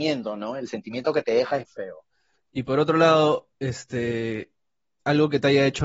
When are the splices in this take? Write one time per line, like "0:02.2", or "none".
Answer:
0:01.7
0:03.5